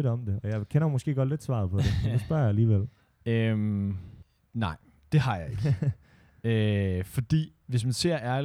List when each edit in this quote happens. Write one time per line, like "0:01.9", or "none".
none